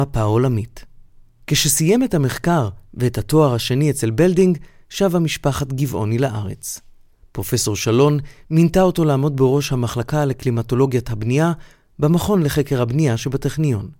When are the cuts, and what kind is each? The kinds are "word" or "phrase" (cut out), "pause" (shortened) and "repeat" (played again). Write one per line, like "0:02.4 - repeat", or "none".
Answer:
none